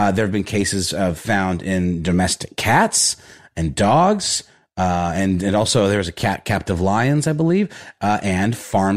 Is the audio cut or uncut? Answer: uncut